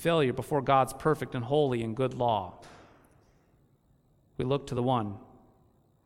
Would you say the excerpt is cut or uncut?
uncut